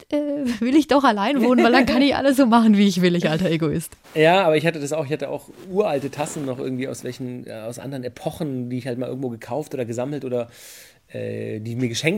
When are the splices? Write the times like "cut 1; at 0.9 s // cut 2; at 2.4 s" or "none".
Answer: cut 1; at 4.0 s